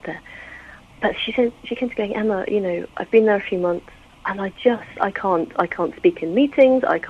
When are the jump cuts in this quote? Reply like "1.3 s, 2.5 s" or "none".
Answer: none